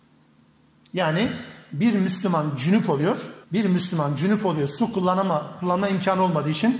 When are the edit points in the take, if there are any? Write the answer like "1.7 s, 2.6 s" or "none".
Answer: 3.4 s